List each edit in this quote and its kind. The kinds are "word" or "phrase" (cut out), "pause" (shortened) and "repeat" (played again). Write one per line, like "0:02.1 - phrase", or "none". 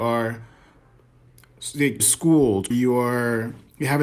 0:02.0 - phrase
0:02.7 - word